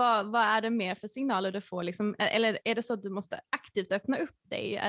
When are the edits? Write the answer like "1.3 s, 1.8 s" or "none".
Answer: none